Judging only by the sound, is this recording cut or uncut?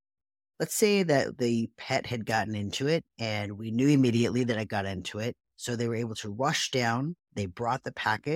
cut